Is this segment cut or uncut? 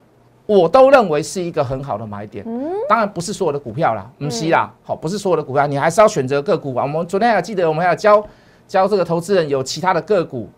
uncut